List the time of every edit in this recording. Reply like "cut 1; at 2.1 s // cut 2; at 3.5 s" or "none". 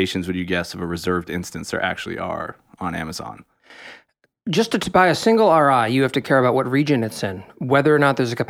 none